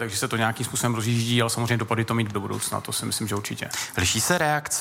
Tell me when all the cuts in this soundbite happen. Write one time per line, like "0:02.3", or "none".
0:02.3